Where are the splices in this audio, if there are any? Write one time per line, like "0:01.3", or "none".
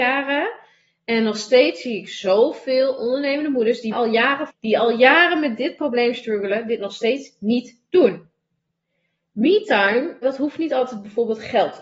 0:03.9
0:04.5
0:10.2